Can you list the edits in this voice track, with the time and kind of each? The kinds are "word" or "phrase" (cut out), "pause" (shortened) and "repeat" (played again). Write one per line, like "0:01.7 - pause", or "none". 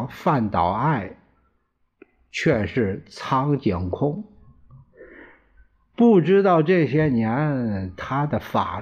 none